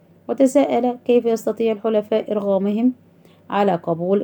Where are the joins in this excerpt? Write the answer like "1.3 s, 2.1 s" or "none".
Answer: none